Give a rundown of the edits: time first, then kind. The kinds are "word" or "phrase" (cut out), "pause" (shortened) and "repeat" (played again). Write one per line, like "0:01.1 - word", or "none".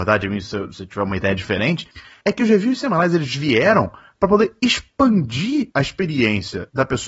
none